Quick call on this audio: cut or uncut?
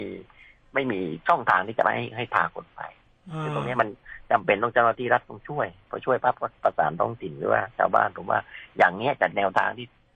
uncut